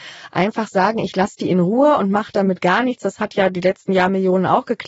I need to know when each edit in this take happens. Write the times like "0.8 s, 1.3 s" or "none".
none